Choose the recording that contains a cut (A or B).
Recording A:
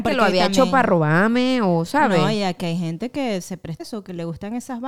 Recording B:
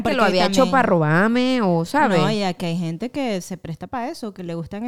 A